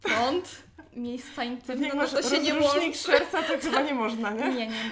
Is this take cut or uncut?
uncut